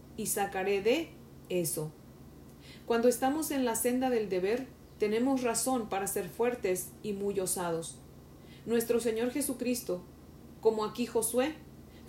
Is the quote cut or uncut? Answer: uncut